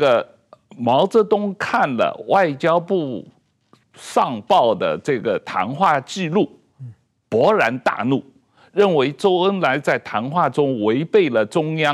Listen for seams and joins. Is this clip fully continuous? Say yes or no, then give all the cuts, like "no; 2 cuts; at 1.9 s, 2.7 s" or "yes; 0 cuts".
yes; 0 cuts